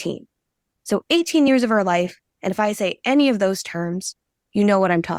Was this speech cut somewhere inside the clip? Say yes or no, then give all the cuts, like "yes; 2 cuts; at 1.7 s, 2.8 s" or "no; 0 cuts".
no; 0 cuts